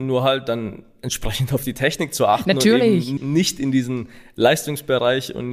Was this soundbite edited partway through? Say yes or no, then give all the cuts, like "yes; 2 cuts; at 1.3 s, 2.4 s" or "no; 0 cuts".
yes; 1 cut; at 3.2 s